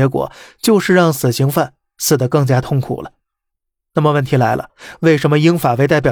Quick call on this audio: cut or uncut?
uncut